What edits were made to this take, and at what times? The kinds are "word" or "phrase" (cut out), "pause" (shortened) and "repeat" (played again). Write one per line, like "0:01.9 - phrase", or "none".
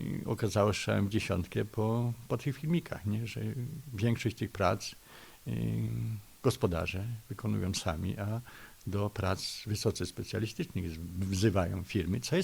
none

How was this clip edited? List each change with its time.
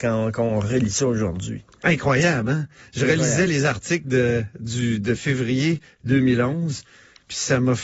none

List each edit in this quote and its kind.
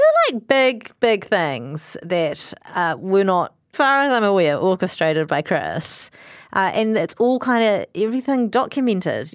0:03.7 - word

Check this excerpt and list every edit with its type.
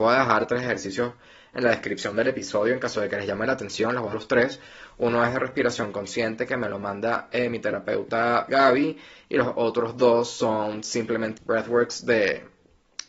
0:04.1 - word
0:08.5 - word
0:11.4 - word

